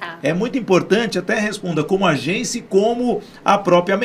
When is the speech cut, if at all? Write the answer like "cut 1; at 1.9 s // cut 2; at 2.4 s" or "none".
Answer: none